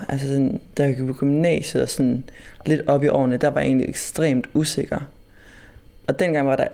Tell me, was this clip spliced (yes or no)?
no